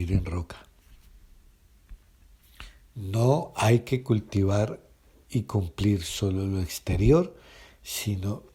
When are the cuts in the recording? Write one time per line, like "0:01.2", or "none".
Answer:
none